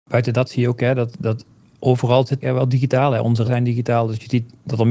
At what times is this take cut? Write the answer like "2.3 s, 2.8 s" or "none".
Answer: 1.1 s, 2.4 s, 3.4 s